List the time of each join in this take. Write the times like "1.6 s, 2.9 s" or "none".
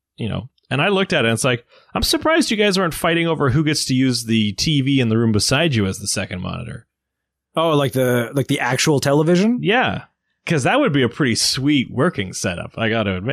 none